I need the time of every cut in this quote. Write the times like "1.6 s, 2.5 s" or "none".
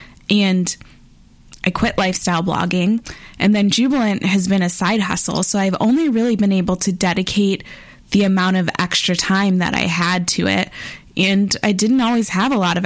none